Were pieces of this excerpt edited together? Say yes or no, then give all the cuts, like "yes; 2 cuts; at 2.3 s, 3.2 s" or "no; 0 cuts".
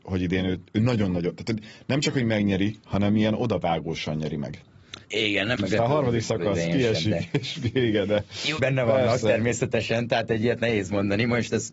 yes; 4 cuts; at 2.8 s, 5.0 s, 5.6 s, 8.6 s